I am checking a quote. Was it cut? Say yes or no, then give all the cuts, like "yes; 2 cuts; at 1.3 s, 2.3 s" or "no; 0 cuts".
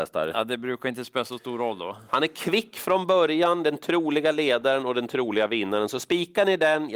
no; 0 cuts